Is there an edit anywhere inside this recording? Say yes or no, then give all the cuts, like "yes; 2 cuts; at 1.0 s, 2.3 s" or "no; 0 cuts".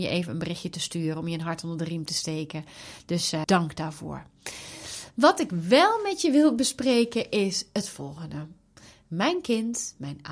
yes; 1 cut; at 3.4 s